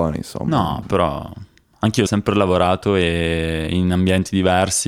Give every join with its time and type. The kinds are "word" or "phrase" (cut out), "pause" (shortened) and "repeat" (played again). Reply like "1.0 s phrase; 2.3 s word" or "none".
2.1 s word

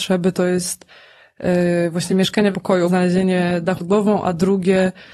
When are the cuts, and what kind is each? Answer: 2.1 s word; 2.5 s word; 2.9 s word; 3.8 s word

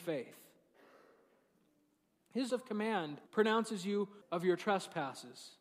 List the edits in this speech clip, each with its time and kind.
2.5 s word; 3.3 s pause; 4.2 s word

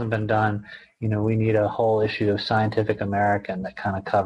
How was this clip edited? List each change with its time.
none

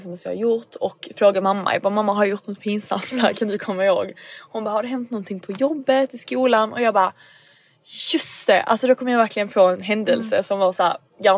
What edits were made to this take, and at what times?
none

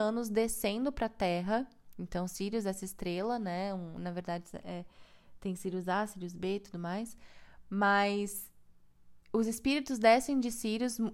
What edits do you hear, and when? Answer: 9.2 s pause

